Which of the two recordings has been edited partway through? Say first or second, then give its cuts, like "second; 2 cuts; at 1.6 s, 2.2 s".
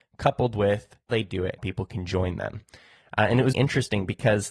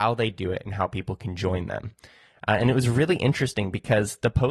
first; 3 cuts; at 1.1 s, 1.6 s, 3.5 s